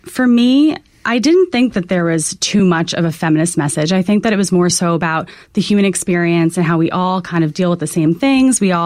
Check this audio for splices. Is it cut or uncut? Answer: uncut